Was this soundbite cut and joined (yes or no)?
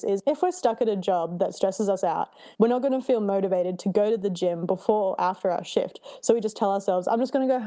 yes